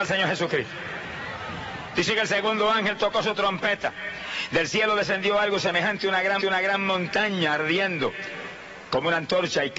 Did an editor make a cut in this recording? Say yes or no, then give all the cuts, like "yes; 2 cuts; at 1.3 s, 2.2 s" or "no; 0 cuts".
yes; 1 cut; at 6.4 s